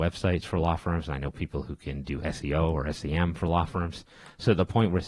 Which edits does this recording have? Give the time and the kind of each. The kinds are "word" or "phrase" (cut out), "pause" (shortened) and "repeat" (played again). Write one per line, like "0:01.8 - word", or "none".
none

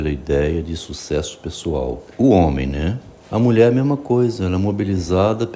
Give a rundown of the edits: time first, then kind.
0:02.1 - pause
0:03.2 - pause

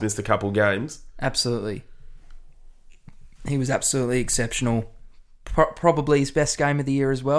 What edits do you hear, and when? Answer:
0:03.4 - pause

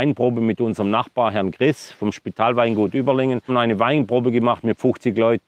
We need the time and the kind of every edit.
0:03.5 - phrase

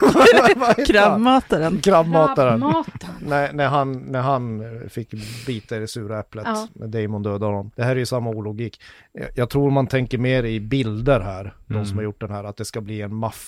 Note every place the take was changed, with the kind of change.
0:07.7 - pause

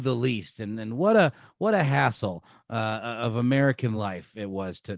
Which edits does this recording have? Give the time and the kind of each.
none

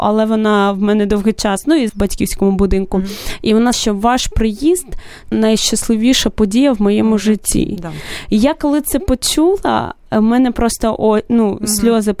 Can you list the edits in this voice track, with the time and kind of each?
0:01.9 - phrase
0:03.7 - word
0:05.3 - phrase

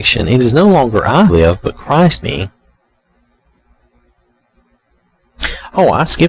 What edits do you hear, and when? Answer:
0:01.3 - word
0:02.2 - phrase

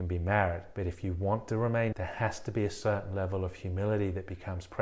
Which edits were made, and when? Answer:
0:01.9 - word

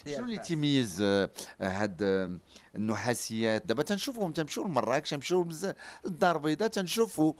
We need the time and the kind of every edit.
0:03.6 - word

